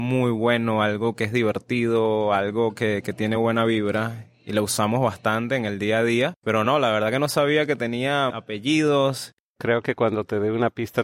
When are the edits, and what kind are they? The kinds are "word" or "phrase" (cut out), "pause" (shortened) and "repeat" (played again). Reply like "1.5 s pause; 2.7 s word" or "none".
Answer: none